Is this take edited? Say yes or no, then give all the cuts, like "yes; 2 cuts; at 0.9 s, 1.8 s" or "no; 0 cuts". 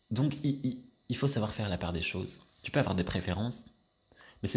no; 0 cuts